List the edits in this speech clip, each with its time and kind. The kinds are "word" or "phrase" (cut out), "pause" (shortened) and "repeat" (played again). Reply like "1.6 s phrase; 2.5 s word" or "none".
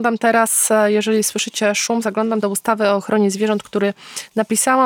2.4 s phrase